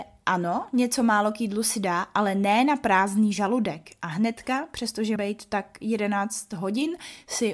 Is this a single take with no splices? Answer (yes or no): no